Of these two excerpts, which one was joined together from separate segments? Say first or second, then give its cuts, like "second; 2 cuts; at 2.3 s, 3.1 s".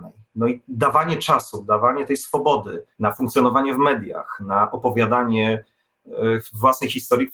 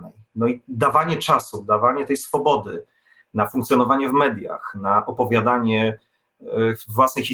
first; 1 cut; at 2.9 s